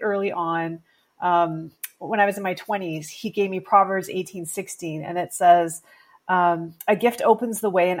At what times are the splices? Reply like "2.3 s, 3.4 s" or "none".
none